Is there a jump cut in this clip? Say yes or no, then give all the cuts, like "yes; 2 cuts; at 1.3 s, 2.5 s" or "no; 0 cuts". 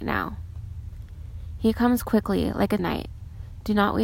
yes; 1 cut; at 2.8 s